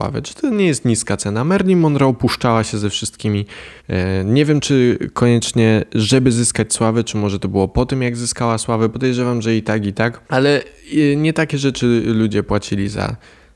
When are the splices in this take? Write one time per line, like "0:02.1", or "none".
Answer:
0:03.8
0:10.3